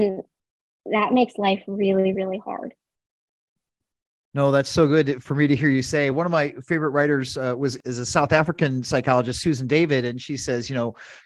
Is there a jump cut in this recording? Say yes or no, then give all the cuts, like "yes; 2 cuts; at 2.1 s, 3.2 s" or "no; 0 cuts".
no; 0 cuts